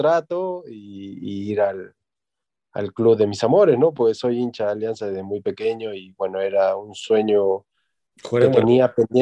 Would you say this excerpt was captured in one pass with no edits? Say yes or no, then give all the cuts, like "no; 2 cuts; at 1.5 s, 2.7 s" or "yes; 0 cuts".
yes; 0 cuts